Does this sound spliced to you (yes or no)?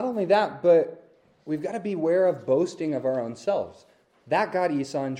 no